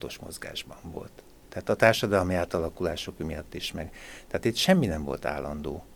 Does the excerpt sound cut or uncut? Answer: uncut